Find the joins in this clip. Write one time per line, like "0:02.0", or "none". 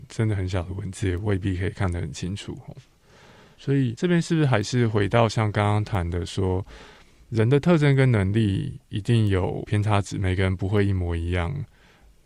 none